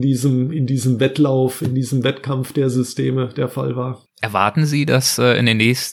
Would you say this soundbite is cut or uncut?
cut